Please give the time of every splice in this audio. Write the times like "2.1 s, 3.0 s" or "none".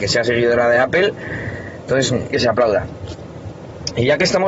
2.3 s